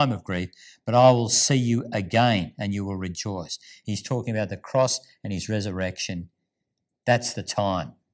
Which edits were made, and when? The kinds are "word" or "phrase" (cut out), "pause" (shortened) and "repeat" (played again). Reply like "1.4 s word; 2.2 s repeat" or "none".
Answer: none

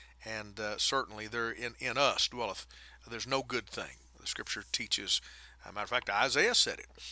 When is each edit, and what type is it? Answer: none

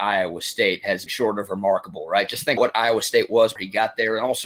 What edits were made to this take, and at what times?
1.1 s phrase; 2.6 s word; 3.6 s word

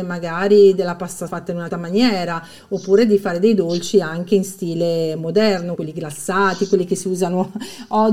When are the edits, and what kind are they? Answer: 1.3 s word; 1.7 s word; 5.8 s word

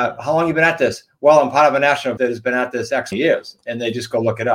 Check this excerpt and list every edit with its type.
2.2 s word; 3.1 s word

